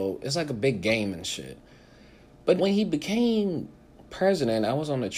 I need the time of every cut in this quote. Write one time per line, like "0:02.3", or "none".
0:02.6